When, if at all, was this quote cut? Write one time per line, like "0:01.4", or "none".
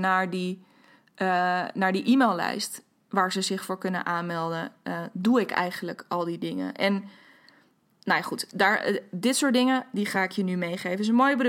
none